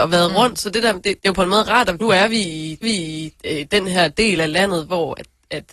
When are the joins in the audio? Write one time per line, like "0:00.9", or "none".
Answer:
0:01.2
0:02.0
0:02.8